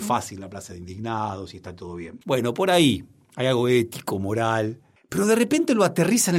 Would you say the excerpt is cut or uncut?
uncut